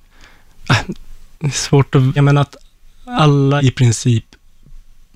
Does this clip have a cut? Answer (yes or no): yes